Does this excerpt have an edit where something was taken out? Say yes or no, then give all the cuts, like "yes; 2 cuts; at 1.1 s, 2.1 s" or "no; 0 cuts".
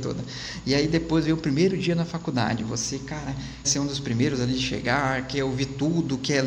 yes; 1 cut; at 3.6 s